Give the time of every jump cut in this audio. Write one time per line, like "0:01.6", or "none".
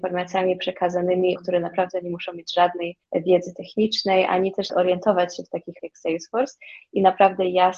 0:01.4
0:03.0
0:04.7
0:05.8